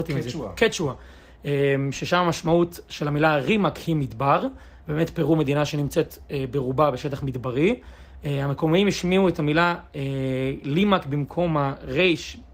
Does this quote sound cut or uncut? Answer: uncut